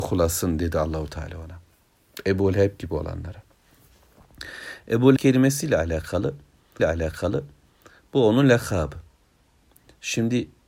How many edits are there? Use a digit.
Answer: 2